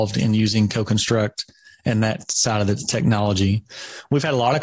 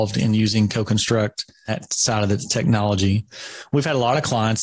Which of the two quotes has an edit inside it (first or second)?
second